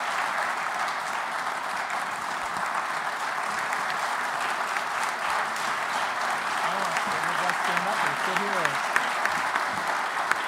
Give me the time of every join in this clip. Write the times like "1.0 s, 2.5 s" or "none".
none

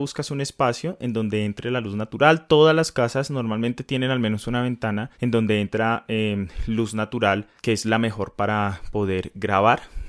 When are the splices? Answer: 5.1 s, 7.6 s

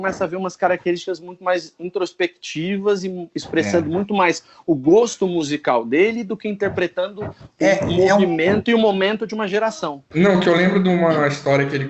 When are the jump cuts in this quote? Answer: none

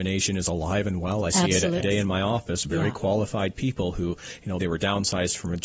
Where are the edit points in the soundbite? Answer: 1.8 s, 4.6 s

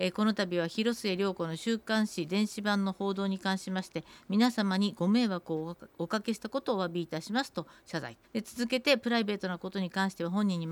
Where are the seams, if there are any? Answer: 8.3 s

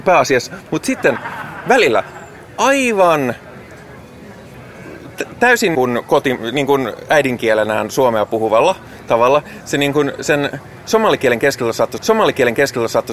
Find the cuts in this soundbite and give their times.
5.7 s, 12.0 s

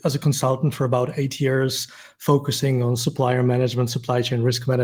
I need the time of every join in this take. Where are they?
none

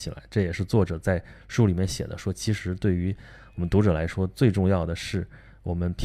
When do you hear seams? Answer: none

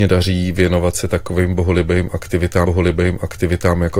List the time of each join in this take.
2.7 s

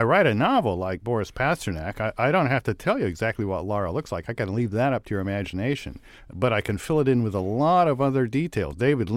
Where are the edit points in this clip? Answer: 1.0 s

